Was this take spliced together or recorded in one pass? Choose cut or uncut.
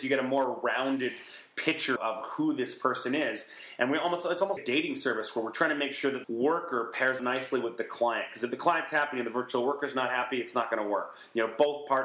cut